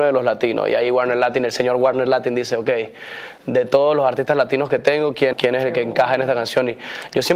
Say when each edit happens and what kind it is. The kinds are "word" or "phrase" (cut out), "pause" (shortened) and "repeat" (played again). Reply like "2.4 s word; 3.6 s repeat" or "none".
5.3 s word